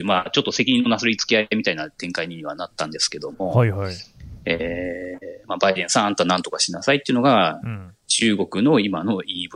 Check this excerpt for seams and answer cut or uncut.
cut